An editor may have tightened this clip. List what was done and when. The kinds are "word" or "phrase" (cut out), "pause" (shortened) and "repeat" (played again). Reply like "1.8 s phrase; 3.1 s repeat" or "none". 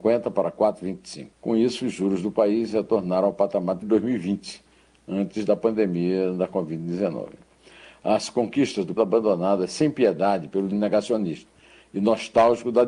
1.3 s pause; 3.8 s word; 9.0 s phrase; 10.7 s word

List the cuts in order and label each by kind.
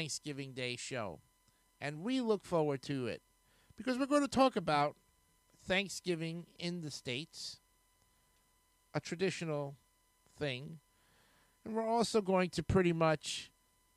none

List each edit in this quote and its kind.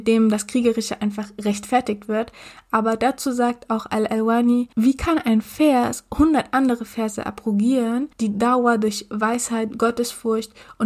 4.7 s pause; 8.1 s pause

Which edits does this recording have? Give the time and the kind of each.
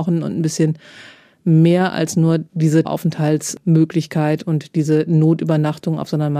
2.8 s word

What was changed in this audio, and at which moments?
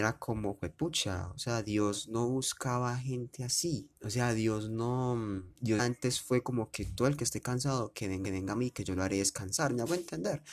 4.0 s pause; 5.8 s word; 8.2 s repeat

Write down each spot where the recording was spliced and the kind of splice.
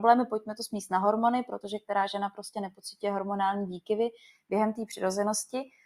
none

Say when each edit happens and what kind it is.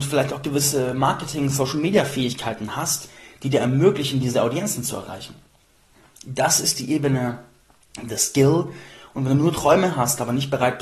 none

